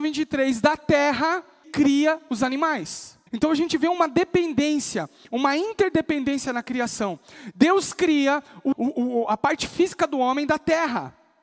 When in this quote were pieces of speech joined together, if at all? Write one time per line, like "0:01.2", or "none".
0:01.6
0:03.3
0:08.7